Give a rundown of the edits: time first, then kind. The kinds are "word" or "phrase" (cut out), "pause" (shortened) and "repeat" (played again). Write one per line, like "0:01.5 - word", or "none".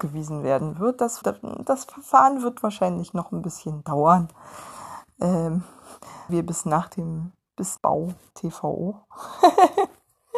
0:01.2 - word
0:06.3 - word
0:07.8 - word
0:08.3 - word